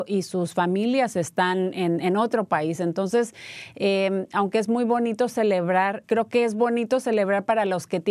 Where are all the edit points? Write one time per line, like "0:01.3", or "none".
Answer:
0:06.0